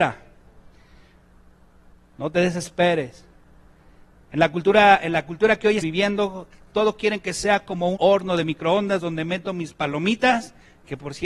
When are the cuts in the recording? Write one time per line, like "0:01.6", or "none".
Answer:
0:05.8
0:06.7
0:07.9

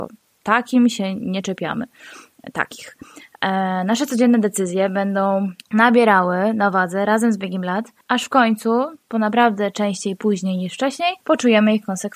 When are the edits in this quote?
0:05.6
0:08.0
0:11.2

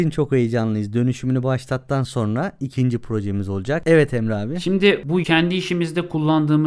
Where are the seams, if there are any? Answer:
0:05.2

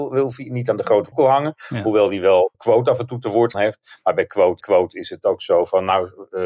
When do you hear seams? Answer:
0:01.1
0:02.5
0:03.5
0:04.6

